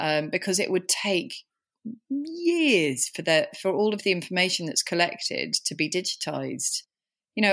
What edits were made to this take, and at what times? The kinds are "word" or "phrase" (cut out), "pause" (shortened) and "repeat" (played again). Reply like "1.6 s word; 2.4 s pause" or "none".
none